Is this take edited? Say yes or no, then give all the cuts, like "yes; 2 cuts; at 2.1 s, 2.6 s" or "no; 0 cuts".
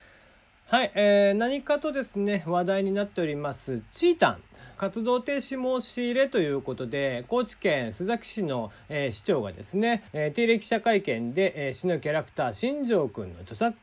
yes; 2 cuts; at 4.8 s, 10.1 s